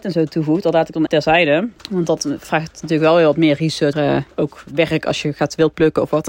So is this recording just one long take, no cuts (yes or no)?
no